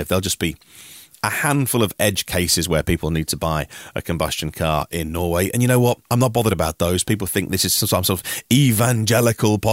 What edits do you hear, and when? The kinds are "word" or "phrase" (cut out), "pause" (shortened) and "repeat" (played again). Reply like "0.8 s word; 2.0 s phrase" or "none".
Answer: 6.0 s pause